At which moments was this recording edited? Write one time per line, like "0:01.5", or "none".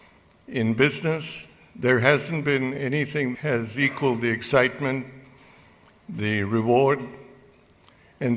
0:03.3